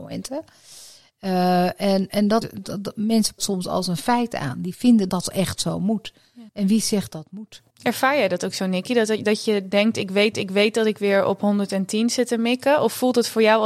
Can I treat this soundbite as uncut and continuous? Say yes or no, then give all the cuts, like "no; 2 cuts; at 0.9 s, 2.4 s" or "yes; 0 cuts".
no; 8 cuts; at 2.1 s, 2.4 s, 3.4 s, 5.1 s, 6.5 s, 7.1 s, 7.7 s, 10.3 s